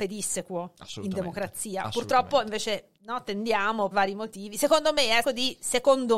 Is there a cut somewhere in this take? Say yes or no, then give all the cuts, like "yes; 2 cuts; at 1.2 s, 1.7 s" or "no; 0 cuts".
yes; 3 cuts; at 3.0 s, 3.9 s, 5.2 s